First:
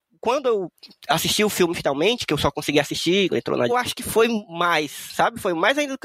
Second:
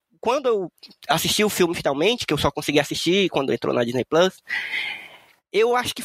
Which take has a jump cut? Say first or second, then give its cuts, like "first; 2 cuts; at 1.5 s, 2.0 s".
first; 2 cuts; at 3.3 s, 3.7 s